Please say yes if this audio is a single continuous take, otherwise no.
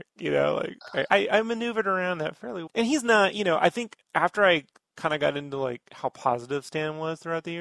no